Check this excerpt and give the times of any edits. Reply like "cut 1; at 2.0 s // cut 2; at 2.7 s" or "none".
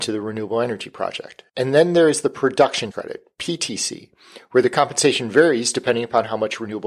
cut 1; at 1.5 s // cut 2; at 2.9 s